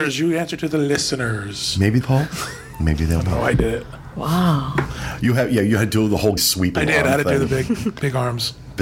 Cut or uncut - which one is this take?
cut